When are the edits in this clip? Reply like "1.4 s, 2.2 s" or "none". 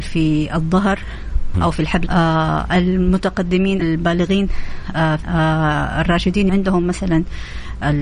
1.5 s, 2.1 s, 3.8 s, 5.2 s, 6.5 s